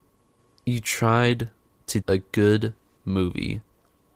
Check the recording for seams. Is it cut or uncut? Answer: cut